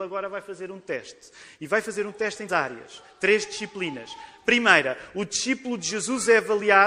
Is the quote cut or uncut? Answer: cut